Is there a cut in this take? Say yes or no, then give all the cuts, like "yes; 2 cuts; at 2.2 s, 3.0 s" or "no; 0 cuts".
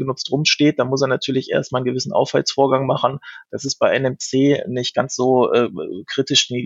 no; 0 cuts